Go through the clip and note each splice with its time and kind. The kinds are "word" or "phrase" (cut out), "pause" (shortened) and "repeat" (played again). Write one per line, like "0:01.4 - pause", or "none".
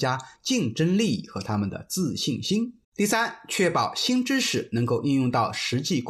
0:02.8 - pause